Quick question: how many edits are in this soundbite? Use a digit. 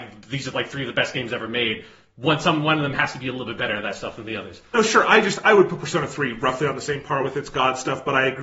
0